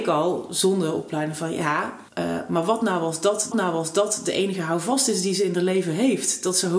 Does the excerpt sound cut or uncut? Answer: cut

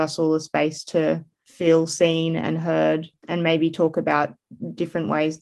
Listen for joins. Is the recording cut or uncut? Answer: uncut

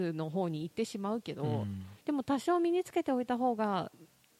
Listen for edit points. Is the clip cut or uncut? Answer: cut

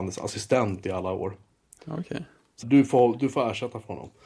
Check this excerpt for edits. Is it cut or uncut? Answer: cut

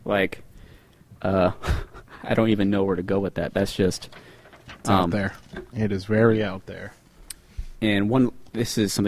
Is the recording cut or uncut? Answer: uncut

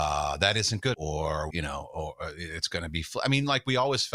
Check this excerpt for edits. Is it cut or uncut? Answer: cut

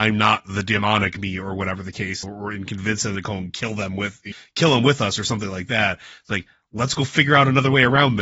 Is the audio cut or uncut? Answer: cut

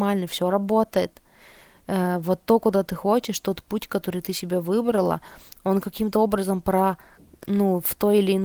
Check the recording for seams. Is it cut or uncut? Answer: uncut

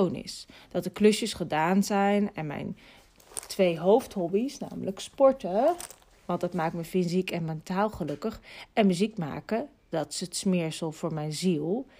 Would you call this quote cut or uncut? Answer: uncut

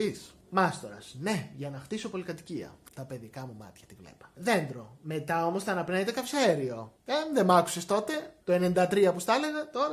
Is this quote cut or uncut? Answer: cut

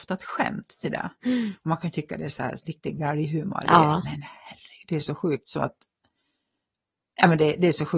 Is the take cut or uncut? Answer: cut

